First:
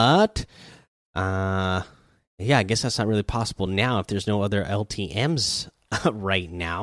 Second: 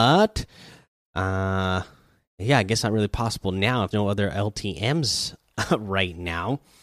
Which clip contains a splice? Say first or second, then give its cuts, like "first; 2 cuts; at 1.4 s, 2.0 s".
second; 2 cuts; at 2.8 s, 3.9 s